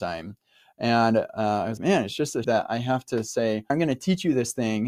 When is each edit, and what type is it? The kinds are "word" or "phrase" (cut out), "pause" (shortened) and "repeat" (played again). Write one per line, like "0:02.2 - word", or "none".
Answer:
0:01.8 - word
0:02.4 - word
0:03.7 - word